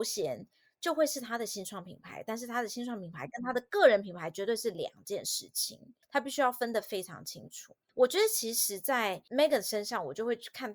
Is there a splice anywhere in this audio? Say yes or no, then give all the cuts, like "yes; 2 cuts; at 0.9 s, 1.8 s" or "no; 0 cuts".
yes; 2 cuts; at 6.0 s, 7.8 s